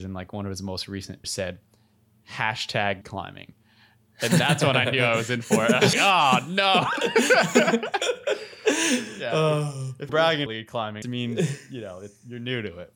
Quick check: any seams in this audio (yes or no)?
yes